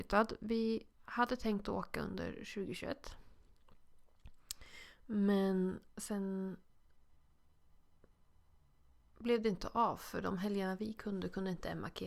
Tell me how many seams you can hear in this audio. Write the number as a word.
two